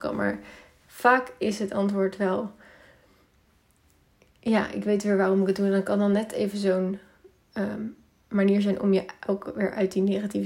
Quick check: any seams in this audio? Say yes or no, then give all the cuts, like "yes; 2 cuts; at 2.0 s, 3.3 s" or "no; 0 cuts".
no; 0 cuts